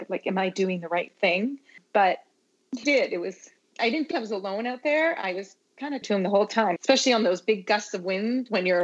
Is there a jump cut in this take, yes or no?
yes